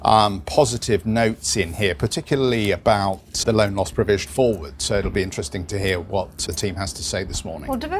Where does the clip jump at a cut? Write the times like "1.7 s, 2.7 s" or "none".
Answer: 3.4 s, 4.3 s, 6.5 s